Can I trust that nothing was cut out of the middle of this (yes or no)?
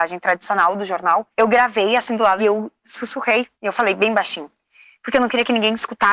no